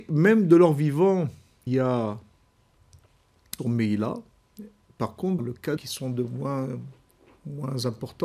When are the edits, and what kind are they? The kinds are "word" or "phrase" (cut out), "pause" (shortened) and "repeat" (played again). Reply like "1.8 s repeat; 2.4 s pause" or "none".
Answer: 1.7 s word; 3.6 s word; 5.4 s phrase; 5.8 s phrase